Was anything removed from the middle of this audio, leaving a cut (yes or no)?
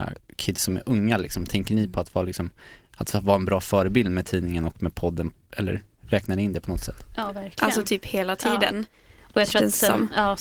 no